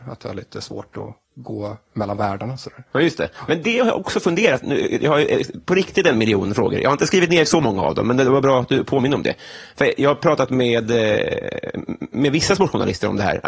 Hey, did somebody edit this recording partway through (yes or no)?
yes